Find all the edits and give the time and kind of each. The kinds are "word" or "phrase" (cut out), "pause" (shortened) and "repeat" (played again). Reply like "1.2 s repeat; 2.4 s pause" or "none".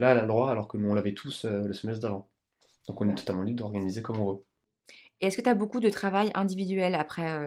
none